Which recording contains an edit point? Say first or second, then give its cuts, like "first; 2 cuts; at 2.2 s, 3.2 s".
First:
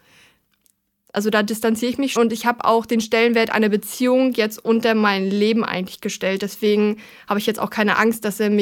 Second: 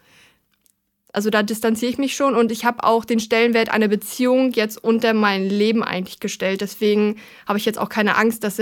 first; 1 cut; at 2.2 s